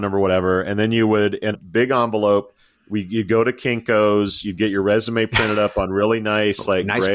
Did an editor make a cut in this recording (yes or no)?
yes